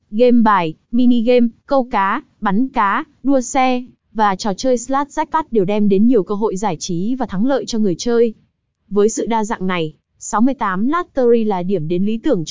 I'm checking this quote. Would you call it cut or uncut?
uncut